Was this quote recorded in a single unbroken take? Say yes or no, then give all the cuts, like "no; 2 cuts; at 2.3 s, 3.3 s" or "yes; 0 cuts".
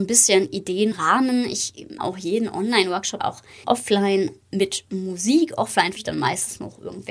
no; 5 cuts; at 0.9 s, 2.0 s, 3.2 s, 3.6 s, 6.0 s